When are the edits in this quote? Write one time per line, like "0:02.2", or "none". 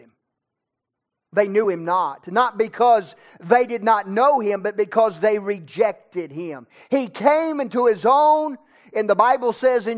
none